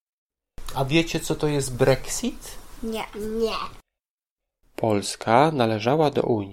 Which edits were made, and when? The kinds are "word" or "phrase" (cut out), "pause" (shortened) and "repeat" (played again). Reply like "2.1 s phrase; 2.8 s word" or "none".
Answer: none